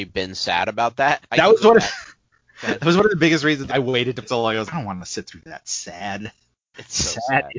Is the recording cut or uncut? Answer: cut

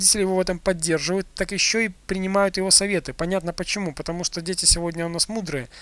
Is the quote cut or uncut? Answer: uncut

